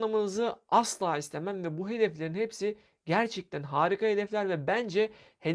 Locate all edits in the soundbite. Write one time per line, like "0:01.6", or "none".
none